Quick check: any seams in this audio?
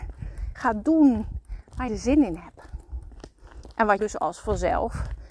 yes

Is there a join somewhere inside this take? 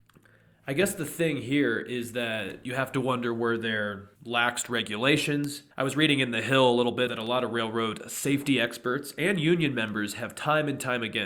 yes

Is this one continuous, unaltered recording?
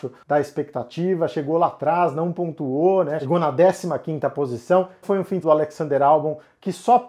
no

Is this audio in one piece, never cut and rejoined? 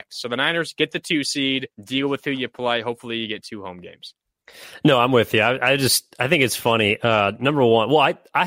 no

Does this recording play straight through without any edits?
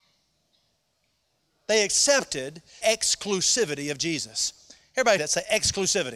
no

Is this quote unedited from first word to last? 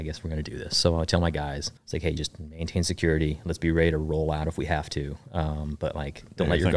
no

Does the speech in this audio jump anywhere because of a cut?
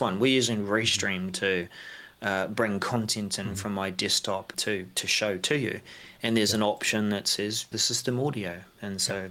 yes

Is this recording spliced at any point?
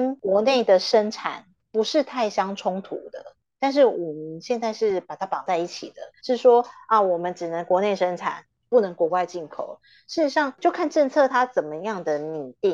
yes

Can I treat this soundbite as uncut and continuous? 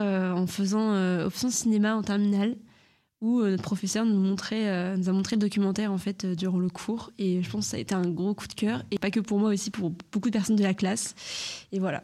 yes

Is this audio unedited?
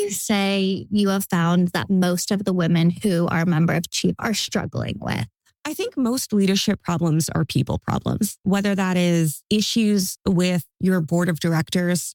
yes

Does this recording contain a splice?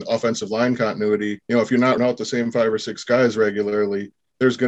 yes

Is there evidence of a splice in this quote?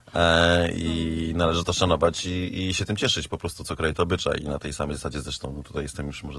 no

